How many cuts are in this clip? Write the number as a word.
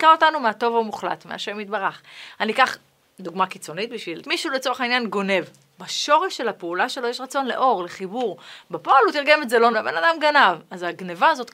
two